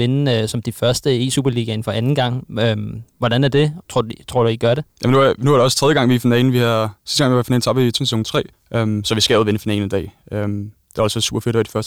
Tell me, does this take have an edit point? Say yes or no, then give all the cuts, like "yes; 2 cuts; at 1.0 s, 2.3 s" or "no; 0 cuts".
yes; 5 cuts; at 3.8 s, 4.9 s, 7.0 s, 8.0 s, 8.5 s